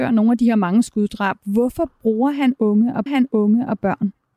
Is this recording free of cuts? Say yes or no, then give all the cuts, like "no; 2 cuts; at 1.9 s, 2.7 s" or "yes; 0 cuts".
no; 1 cut; at 3.1 s